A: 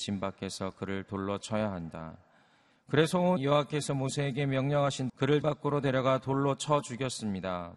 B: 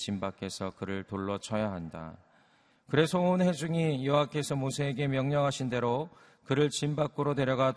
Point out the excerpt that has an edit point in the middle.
A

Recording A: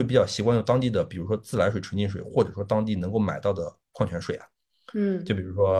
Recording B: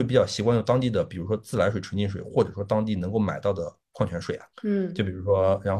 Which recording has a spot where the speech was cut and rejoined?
B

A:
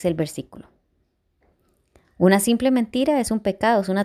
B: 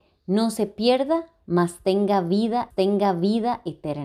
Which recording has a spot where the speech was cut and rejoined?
B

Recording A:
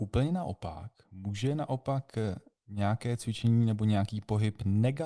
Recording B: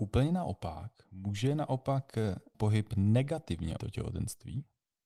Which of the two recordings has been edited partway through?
B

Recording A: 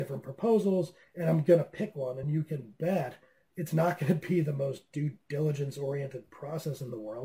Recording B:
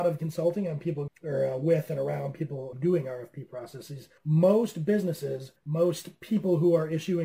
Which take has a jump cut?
B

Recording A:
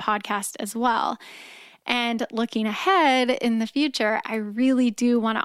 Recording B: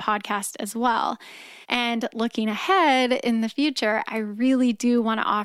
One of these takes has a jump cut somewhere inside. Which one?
B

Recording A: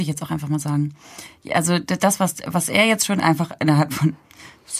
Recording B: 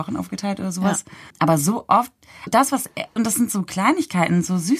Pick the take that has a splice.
B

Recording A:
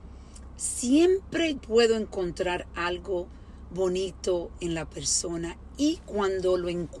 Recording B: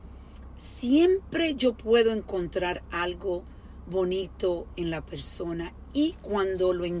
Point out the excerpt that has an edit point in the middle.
A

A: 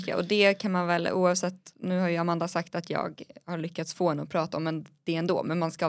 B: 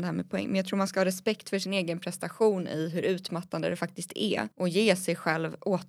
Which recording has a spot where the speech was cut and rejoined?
B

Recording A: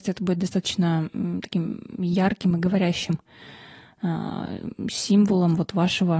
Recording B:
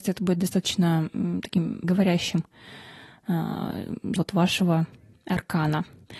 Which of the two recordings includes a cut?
B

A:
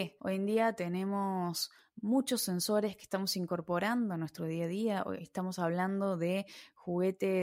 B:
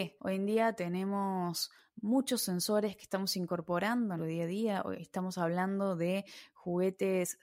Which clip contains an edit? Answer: B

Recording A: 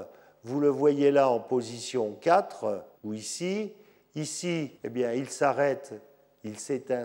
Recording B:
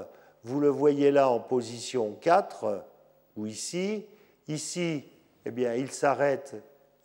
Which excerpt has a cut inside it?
A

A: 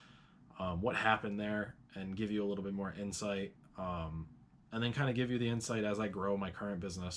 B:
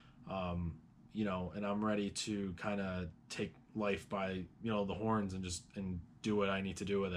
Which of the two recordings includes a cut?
B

